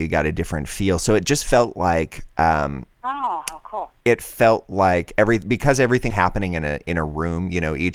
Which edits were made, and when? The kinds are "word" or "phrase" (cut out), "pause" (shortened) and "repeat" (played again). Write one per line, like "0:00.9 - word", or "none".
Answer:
0:06.1 - word